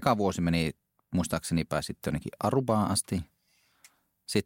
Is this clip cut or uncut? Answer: uncut